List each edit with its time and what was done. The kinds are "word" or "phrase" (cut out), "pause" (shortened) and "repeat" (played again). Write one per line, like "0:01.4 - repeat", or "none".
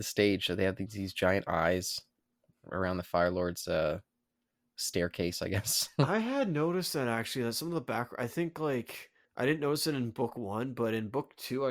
0:09.2 - pause